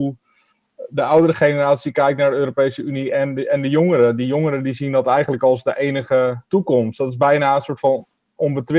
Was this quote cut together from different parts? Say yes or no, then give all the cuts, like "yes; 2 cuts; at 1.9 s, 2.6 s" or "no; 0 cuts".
yes; 1 cut; at 6.5 s